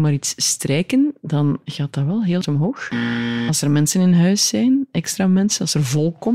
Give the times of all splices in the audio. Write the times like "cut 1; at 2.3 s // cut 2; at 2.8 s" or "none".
cut 1; at 2.4 s